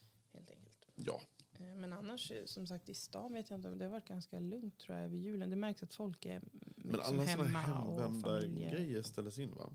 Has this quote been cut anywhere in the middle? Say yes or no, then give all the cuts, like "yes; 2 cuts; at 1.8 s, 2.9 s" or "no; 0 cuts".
no; 0 cuts